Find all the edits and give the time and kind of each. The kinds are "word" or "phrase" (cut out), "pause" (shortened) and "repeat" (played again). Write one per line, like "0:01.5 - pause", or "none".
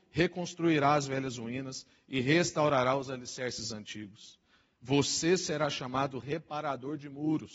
none